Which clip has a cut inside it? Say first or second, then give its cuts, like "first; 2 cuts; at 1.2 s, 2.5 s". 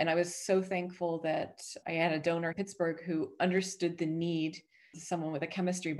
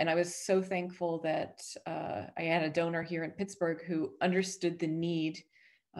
first; 3 cuts; at 1.8 s, 2.5 s, 4.9 s